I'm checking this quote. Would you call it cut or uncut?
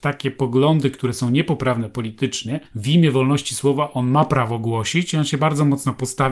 cut